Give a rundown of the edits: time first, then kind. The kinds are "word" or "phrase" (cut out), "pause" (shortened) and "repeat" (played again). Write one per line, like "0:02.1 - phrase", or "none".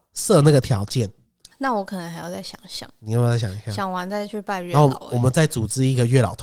0:01.5 - word